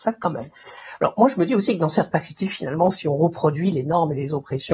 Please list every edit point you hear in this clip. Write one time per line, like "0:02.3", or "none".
none